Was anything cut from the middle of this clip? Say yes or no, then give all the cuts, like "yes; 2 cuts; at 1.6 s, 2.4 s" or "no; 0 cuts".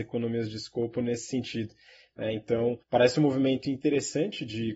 yes; 1 cut; at 2.8 s